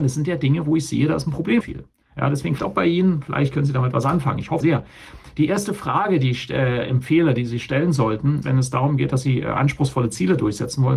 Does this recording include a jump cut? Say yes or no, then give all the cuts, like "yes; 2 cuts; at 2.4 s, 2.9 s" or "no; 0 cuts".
yes; 4 cuts; at 1.6 s, 2.6 s, 4.6 s, 8.4 s